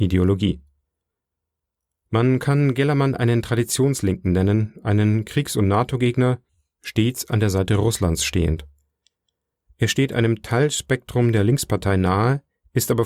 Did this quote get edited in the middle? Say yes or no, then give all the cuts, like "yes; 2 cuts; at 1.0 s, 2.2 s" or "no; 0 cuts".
no; 0 cuts